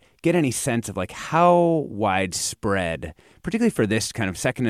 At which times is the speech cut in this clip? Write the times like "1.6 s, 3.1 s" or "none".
none